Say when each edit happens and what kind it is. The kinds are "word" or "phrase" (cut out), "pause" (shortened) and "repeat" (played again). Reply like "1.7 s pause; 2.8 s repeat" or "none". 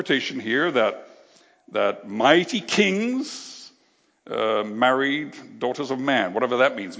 none